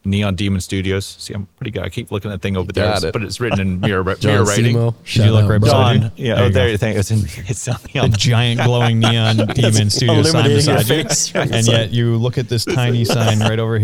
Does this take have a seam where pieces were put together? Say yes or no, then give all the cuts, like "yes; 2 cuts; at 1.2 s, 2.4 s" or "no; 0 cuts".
yes; 2 cuts; at 1.5 s, 7.9 s